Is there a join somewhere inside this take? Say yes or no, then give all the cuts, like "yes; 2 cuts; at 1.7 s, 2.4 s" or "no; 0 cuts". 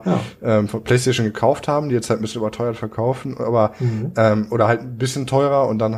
no; 0 cuts